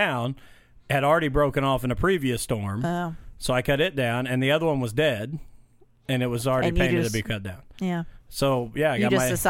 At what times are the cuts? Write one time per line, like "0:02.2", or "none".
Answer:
none